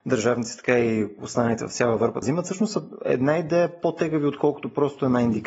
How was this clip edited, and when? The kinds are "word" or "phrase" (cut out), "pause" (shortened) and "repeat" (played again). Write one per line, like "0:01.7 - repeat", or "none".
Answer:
0:02.2 - word